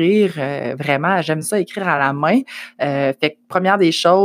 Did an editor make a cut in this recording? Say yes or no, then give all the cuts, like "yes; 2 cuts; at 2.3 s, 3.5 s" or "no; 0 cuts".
no; 0 cuts